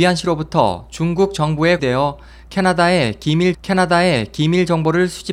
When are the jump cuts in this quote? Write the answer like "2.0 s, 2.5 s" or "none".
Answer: 1.8 s, 3.5 s